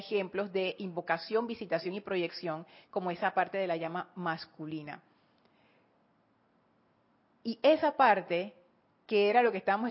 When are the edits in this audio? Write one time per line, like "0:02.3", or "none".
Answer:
none